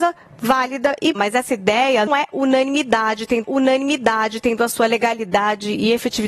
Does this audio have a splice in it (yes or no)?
yes